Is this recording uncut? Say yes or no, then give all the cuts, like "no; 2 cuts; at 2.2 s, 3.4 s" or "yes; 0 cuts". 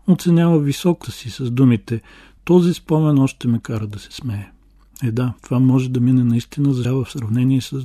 no; 3 cuts; at 1.0 s, 5.4 s, 6.8 s